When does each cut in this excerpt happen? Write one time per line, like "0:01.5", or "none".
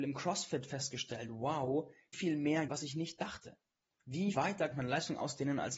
0:02.1
0:02.7
0:04.3
0:04.7